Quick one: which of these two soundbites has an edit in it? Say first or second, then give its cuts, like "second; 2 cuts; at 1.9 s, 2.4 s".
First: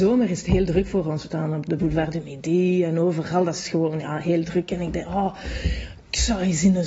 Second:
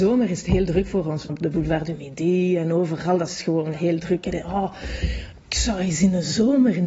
second; 3 cuts; at 1.3 s, 3.8 s, 4.3 s